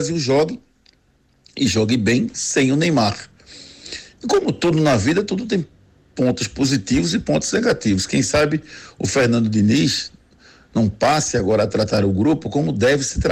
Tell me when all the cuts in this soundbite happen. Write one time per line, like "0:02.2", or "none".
none